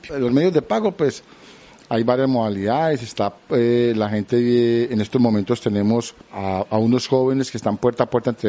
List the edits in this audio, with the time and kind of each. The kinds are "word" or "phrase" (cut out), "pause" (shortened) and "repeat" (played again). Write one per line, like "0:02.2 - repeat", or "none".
none